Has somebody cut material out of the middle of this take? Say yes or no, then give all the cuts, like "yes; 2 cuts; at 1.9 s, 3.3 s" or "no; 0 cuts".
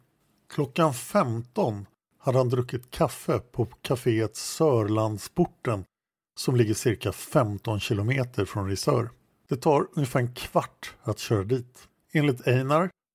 no; 0 cuts